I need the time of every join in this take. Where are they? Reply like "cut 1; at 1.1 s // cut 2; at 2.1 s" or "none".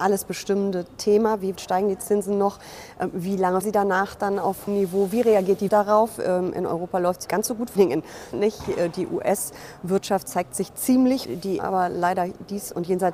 cut 1; at 1.6 s // cut 2; at 3.6 s // cut 3; at 4.7 s // cut 4; at 5.7 s // cut 5; at 7.3 s // cut 6; at 7.8 s // cut 7; at 8.3 s // cut 8; at 11.2 s // cut 9; at 11.6 s